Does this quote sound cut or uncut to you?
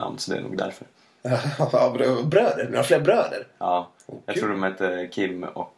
uncut